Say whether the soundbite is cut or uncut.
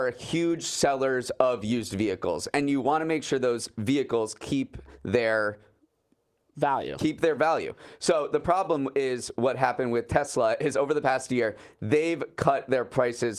uncut